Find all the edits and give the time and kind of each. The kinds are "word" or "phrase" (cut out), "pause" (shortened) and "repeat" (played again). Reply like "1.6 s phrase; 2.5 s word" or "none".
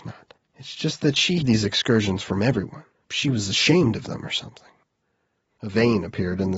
1.4 s word; 3.0 s word

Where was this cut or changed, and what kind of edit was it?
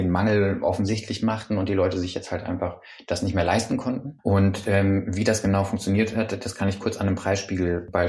none

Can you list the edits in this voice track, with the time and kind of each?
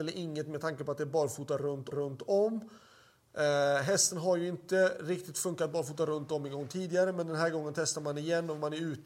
1.9 s repeat

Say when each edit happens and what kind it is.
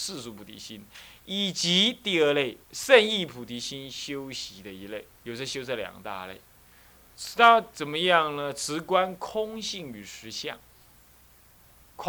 2.6 s pause; 5.1 s pause

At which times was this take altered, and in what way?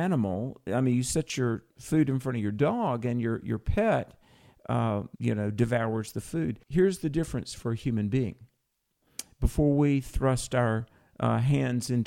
1.7 s pause; 5.2 s word; 6.6 s pause

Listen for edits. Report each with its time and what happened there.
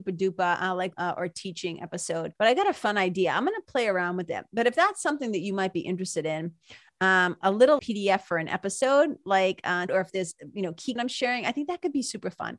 0.9 s word; 2.4 s pause; 7.8 s word; 9.9 s phrase; 11.0 s phrase

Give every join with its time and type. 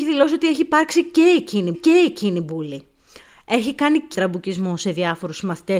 1.7 s repeat; 4.1 s word

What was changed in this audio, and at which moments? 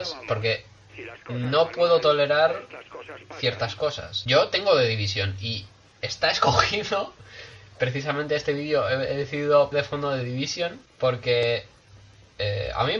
9.7 s word

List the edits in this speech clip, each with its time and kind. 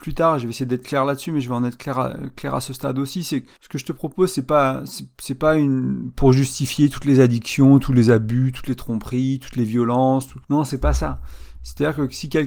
3.6 s pause; 10.4 s pause

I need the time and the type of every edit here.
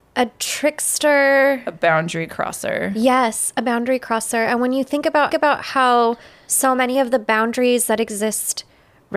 5.3 s repeat

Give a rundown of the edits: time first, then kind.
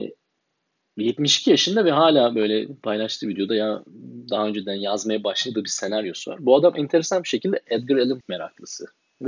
8.2 s word

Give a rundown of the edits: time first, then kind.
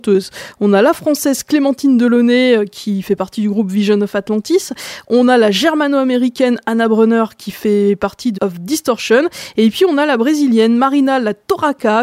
8.4 s word

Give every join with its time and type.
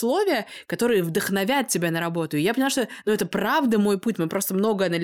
none

